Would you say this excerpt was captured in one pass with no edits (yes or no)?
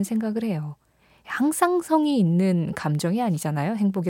yes